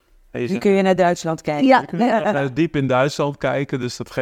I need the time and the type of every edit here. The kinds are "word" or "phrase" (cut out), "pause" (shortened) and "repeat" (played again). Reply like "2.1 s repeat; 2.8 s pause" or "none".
none